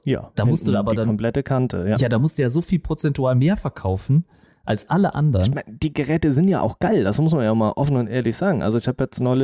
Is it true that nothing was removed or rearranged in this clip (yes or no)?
yes